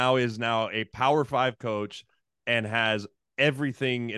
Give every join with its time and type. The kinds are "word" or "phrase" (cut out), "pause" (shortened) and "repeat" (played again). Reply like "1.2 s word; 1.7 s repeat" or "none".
none